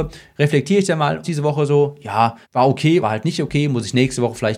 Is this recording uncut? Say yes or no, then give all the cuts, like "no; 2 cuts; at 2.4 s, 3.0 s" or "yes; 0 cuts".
no; 3 cuts; at 1.2 s, 2.4 s, 3.0 s